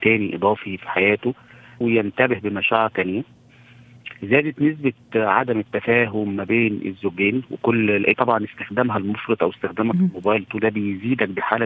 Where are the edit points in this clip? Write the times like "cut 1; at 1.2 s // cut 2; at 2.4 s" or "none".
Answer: cut 1; at 1.8 s // cut 2; at 2.9 s // cut 3; at 8.1 s // cut 4; at 10.6 s

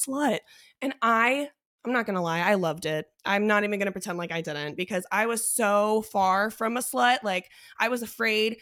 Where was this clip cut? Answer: none

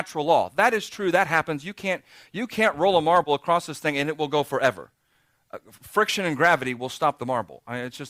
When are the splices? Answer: none

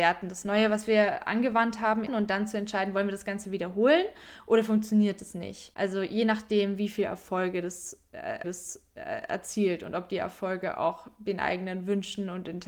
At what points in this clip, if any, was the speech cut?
cut 1; at 2.1 s // cut 2; at 8.4 s

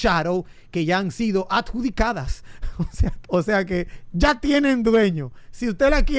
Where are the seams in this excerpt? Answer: cut 1; at 3.2 s

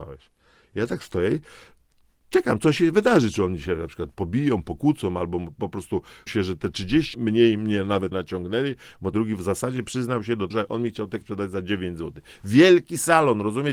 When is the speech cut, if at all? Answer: cut 1; at 6.3 s // cut 2; at 7.1 s // cut 3; at 8.1 s // cut 4; at 9.1 s // cut 5; at 10.5 s // cut 6; at 11.2 s

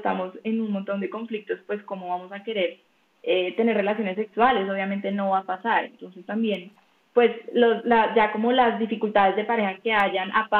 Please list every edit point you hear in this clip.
none

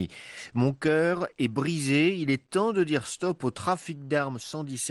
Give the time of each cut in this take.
none

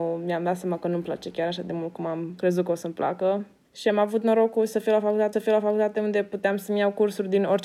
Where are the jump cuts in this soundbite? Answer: cut 1; at 3.6 s // cut 2; at 5.3 s

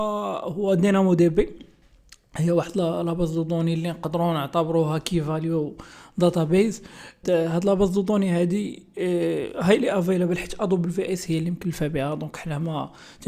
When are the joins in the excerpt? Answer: cut 1; at 7.2 s

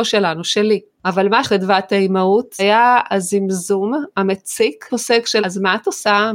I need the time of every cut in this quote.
cut 1; at 1.4 s // cut 2; at 2.6 s // cut 3; at 4.9 s // cut 4; at 5.4 s

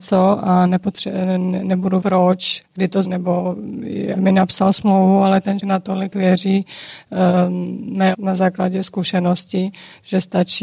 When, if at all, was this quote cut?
cut 1; at 2.0 s // cut 2; at 2.6 s // cut 3; at 3.0 s // cut 4; at 4.1 s // cut 5; at 5.6 s // cut 6; at 8.1 s

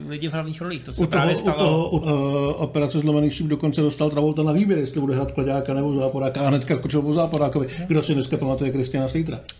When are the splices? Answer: cut 1; at 2.0 s

